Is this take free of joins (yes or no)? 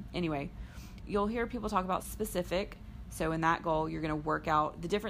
no